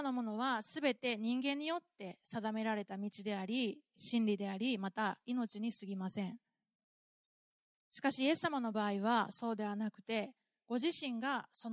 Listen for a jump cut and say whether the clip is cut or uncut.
uncut